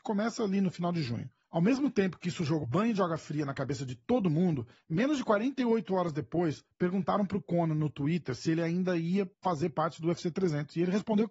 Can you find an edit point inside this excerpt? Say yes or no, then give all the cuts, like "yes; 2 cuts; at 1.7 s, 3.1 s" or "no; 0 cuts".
yes; 2 cuts; at 2.6 s, 9.3 s